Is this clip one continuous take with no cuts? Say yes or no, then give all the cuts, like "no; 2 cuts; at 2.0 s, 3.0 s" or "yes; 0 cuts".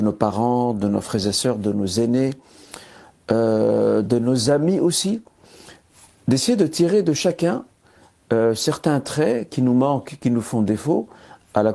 yes; 0 cuts